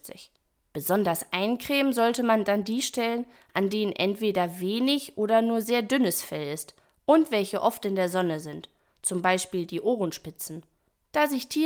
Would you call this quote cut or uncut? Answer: uncut